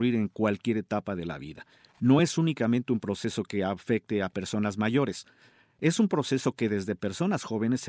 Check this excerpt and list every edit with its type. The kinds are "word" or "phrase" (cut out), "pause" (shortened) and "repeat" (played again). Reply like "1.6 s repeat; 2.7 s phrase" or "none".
none